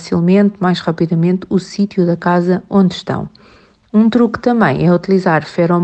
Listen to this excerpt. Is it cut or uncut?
uncut